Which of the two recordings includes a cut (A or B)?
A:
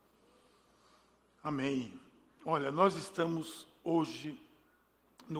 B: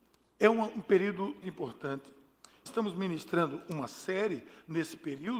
B